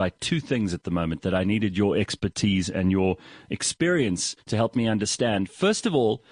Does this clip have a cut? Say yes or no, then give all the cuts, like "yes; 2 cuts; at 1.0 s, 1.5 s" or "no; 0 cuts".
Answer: yes; 1 cut; at 4.4 s